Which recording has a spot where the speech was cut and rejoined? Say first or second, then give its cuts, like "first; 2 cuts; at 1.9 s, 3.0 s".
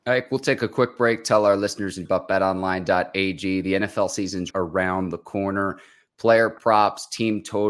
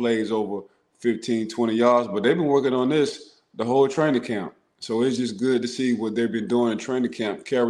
first; 2 cuts; at 2.0 s, 4.5 s